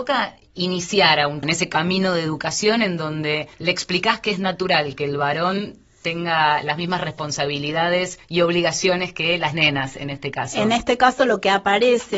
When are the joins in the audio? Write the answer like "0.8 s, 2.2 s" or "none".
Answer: 1.4 s, 3.5 s, 8.2 s